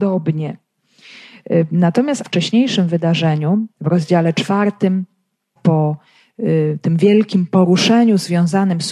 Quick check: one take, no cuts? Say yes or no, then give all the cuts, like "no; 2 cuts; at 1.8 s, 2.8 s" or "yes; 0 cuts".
no; 3 cuts; at 2.2 s, 3.7 s, 5.6 s